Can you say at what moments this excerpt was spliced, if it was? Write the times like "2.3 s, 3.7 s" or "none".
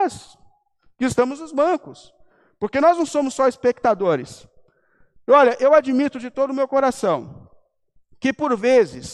none